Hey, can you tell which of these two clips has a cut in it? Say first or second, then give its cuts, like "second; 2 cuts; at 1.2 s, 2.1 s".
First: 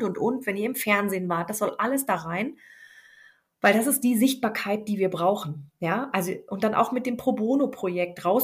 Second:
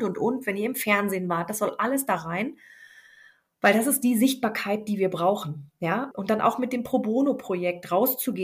second; 1 cut; at 6.1 s